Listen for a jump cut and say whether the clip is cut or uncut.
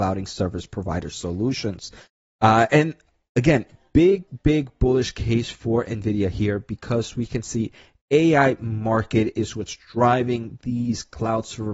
uncut